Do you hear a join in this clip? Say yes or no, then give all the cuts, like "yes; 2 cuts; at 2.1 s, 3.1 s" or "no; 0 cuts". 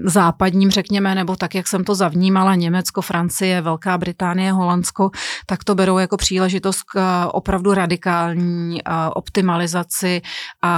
no; 0 cuts